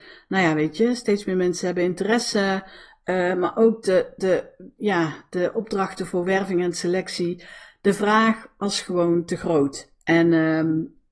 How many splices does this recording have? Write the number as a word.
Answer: zero